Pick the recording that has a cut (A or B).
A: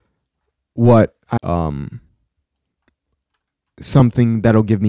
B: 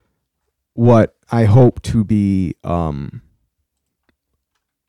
A